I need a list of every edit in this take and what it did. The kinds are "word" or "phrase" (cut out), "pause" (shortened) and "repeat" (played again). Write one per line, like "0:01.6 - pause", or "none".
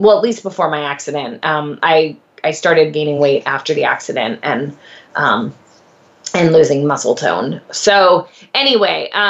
none